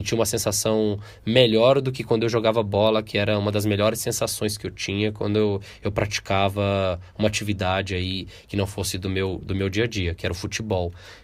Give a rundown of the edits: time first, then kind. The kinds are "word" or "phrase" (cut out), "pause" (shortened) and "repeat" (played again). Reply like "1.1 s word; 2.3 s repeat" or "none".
none

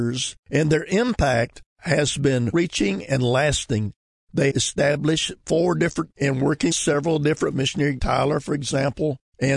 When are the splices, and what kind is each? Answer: 2.5 s word; 4.5 s word; 6.1 s word; 6.7 s word; 7.5 s word; 8.0 s word

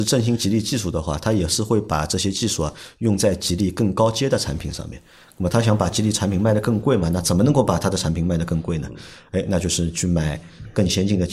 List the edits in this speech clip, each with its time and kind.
none

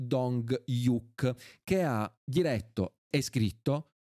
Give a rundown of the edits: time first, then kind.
2.1 s pause

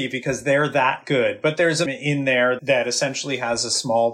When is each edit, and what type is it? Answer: 1.9 s word; 2.6 s word

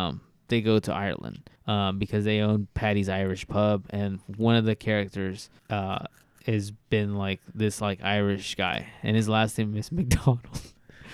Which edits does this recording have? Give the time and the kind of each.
1.6 s pause; 5.6 s pause; 6.8 s pause

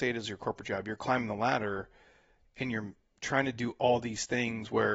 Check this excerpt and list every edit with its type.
none

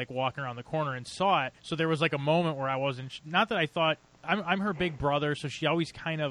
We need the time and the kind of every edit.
1.6 s pause; 4.1 s pause

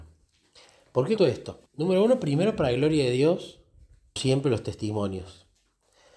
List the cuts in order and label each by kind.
1.2 s word; 1.7 s pause; 4.2 s word

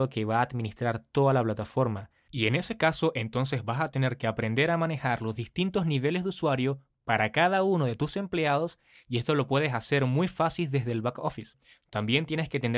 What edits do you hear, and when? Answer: none

